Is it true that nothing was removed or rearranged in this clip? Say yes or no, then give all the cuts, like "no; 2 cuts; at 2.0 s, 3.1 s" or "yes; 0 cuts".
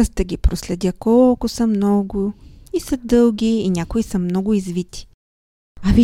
yes; 0 cuts